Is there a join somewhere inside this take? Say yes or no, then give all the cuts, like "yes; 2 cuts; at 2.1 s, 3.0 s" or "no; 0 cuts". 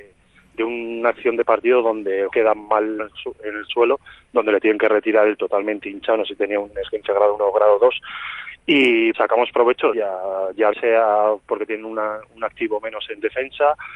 yes; 6 cuts; at 2.3 s, 3.0 s, 5.4 s, 9.1 s, 9.9 s, 10.7 s